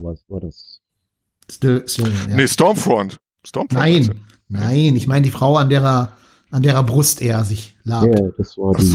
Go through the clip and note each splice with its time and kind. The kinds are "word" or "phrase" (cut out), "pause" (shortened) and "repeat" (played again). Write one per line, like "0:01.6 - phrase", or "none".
none